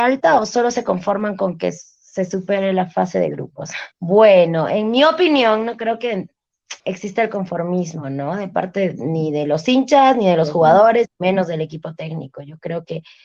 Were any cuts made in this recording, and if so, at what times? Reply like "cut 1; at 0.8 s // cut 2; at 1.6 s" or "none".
cut 1; at 3.9 s // cut 2; at 6.8 s